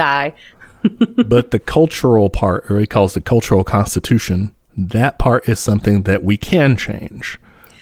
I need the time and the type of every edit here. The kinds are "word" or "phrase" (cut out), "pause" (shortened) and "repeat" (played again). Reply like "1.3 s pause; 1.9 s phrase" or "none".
4.6 s pause